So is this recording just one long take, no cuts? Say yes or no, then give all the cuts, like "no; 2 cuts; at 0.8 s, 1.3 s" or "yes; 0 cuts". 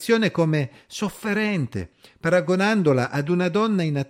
yes; 0 cuts